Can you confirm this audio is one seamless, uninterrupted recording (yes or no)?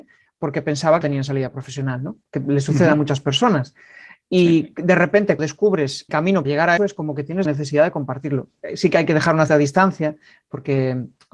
no